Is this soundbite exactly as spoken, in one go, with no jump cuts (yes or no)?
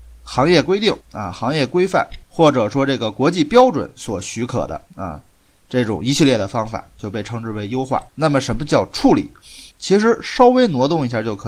no